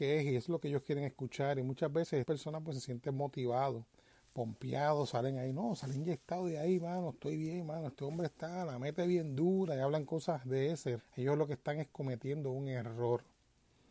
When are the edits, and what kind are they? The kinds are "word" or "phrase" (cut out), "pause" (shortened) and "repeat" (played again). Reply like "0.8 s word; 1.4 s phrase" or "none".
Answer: 2.2 s word; 11.0 s word